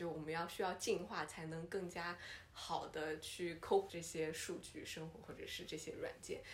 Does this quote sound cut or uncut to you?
cut